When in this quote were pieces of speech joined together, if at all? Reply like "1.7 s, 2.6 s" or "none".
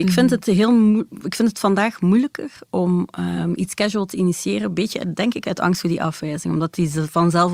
none